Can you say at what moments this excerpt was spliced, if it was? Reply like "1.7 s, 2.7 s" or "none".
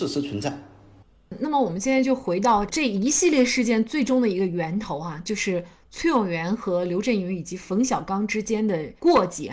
none